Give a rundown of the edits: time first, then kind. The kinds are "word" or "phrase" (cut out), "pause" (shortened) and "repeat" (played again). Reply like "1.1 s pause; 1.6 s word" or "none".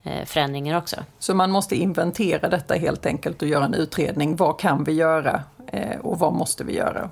none